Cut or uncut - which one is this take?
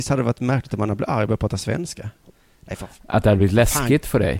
uncut